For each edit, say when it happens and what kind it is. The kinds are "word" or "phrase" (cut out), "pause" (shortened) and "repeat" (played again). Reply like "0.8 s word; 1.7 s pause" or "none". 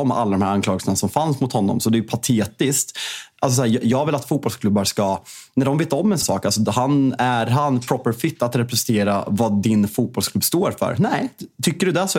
6.2 s word